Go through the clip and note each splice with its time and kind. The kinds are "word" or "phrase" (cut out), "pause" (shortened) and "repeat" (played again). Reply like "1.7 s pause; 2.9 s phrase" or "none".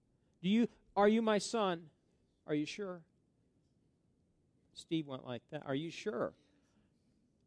none